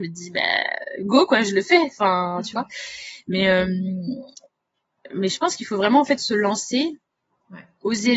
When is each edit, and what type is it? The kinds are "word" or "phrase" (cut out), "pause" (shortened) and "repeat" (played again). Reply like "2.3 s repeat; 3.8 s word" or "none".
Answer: none